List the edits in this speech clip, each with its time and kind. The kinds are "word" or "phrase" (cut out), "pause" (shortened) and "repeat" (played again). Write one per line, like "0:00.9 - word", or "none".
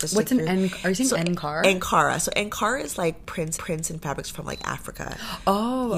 0:03.6 - repeat